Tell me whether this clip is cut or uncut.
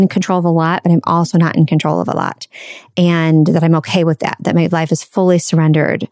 uncut